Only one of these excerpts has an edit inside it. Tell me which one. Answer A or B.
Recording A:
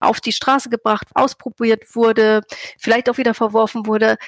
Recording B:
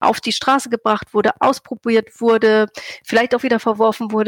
A